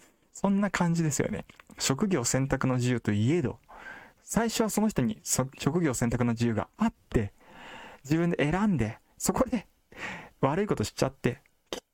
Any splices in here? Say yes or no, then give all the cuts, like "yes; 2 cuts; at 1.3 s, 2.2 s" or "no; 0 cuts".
yes; 1 cut; at 4.1 s